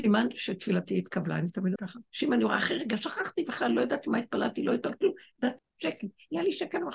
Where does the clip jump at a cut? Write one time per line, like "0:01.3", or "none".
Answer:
0:01.8
0:02.1
0:05.6